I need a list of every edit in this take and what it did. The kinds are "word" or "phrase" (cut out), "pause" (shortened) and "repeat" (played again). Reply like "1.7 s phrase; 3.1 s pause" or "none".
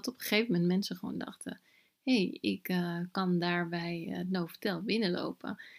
none